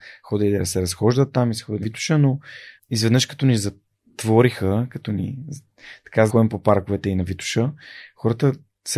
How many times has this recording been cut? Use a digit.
3